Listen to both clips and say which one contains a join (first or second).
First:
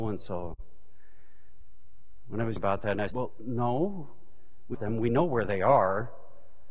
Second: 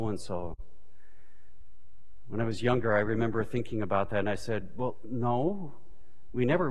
first